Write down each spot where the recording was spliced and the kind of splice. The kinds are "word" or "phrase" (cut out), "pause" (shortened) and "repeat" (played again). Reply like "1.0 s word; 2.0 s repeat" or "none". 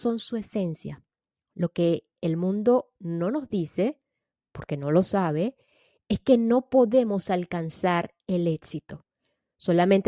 none